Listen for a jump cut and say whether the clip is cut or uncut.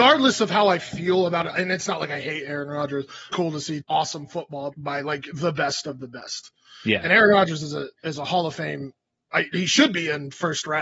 cut